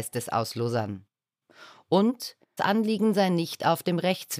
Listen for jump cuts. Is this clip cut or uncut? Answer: cut